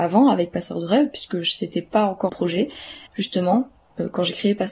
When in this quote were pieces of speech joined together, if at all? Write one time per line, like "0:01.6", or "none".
0:02.3
0:03.1